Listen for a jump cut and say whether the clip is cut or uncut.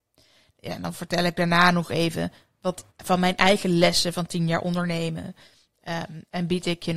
cut